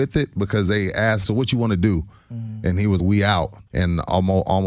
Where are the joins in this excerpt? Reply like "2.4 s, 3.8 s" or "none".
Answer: 1.2 s, 3.0 s, 3.7 s